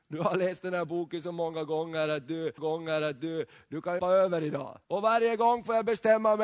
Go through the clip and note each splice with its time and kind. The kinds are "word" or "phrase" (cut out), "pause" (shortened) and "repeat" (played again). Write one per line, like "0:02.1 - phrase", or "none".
0:02.6 - repeat
0:04.0 - word
0:04.8 - pause